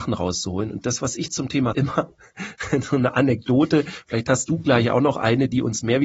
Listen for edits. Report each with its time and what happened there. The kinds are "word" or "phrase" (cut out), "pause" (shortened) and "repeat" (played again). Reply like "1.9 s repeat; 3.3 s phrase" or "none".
1.7 s word